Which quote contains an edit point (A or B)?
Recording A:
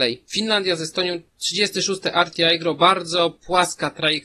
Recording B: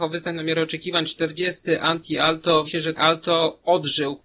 B